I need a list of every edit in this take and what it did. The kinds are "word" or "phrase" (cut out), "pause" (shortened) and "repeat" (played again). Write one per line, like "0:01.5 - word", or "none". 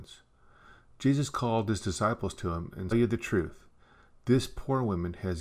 0:02.9 - phrase